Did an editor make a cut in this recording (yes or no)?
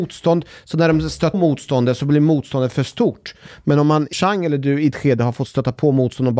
yes